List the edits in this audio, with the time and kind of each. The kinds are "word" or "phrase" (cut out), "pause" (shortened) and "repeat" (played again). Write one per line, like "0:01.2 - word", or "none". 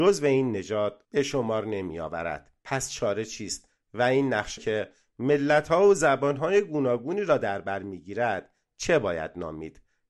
0:02.6 - pause
0:04.6 - word

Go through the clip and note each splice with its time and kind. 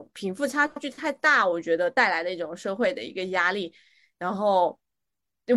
none

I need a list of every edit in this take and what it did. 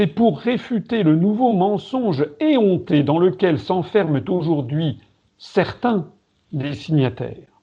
none

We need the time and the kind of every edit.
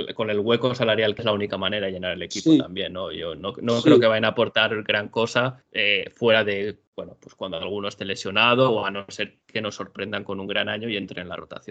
0:01.2 - word
0:05.6 - pause
0:06.9 - pause

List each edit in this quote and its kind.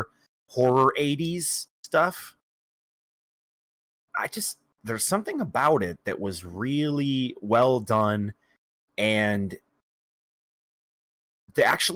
none

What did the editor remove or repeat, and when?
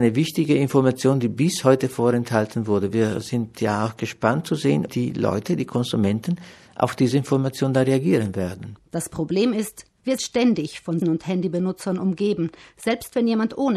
0:04.9 - word
0:10.2 - word
0:11.0 - word

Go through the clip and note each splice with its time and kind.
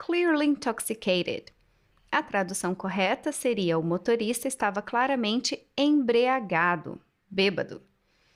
none

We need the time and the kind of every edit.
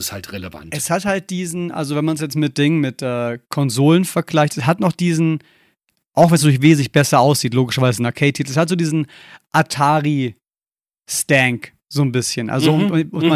none

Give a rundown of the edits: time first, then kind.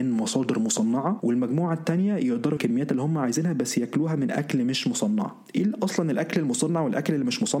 0:02.6 - word

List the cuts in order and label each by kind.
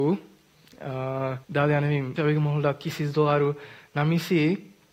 0:01.4 - pause
0:02.2 - word

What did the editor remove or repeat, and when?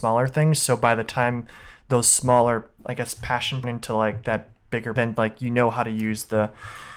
0:02.8 - pause
0:03.6 - phrase
0:05.0 - phrase

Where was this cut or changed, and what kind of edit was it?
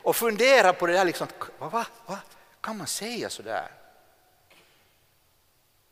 none

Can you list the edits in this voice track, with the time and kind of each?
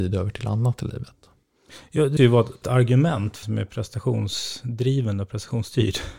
0:02.2 - word
0:02.6 - word
0:03.4 - word

